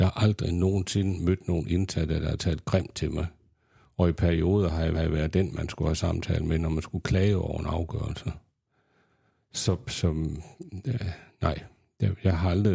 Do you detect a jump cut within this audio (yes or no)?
yes